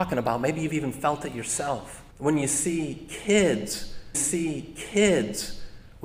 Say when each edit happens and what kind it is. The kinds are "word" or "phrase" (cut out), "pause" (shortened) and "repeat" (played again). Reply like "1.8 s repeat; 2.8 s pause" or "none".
2.1 s pause; 4.1 s repeat